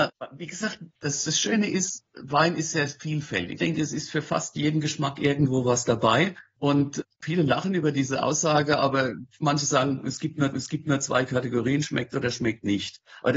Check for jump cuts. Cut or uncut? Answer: cut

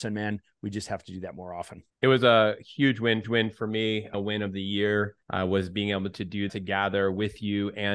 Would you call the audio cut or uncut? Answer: cut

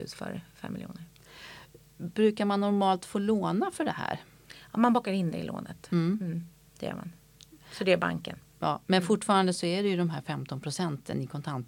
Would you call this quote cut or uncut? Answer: uncut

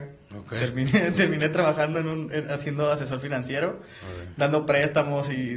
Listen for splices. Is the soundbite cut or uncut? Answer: uncut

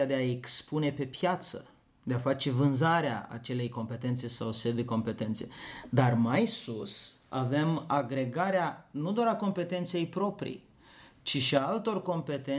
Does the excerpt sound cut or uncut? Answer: uncut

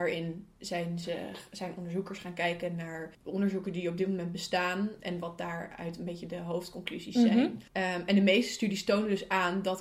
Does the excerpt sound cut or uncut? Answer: cut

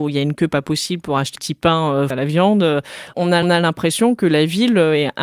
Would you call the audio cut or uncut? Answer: cut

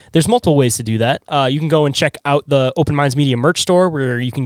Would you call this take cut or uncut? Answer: uncut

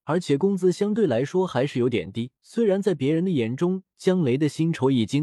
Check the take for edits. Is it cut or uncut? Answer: cut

